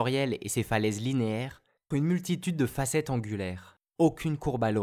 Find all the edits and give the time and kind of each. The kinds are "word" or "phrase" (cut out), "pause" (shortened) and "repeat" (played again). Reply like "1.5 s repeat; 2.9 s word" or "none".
1.9 s word